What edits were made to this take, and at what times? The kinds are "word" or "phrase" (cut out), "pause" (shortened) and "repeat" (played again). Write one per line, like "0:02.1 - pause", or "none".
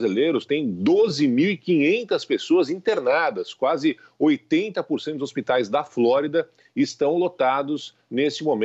none